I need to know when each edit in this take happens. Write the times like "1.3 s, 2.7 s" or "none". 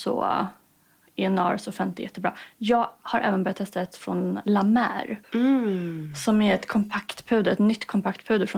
5.2 s